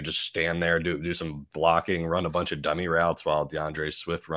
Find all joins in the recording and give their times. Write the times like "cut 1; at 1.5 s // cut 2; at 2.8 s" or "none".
none